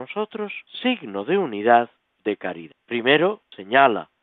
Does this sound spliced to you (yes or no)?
yes